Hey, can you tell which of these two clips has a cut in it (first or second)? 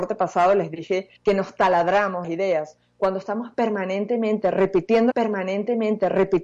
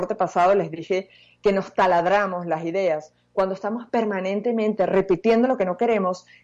first